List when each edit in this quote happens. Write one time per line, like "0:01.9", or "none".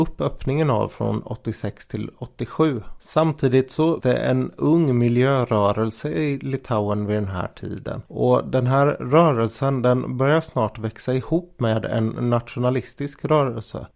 0:04.0
0:08.1